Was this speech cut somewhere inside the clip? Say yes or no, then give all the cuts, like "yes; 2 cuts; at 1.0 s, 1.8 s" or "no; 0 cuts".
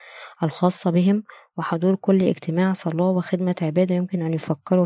no; 0 cuts